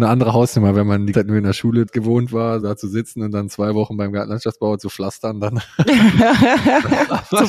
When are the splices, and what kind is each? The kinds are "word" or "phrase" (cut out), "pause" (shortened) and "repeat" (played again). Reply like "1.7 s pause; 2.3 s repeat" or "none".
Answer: 1.1 s word; 1.9 s word; 2.6 s word